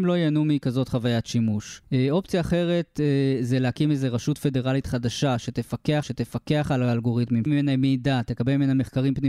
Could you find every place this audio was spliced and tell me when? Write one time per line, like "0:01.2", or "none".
0:01.8
0:06.0
0:07.5